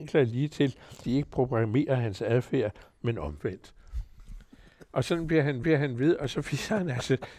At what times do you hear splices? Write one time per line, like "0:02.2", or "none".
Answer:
0:01.0
0:05.6